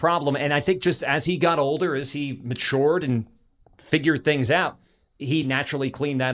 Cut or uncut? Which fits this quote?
uncut